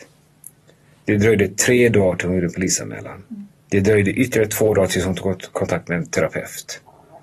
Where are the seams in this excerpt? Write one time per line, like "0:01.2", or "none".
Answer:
0:03.6